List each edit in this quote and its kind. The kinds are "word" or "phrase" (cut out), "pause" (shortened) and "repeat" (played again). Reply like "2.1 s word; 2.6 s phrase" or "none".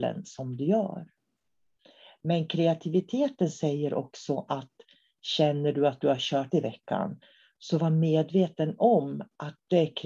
6.5 s word